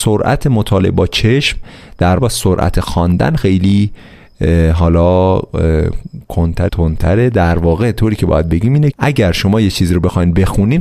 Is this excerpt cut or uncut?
cut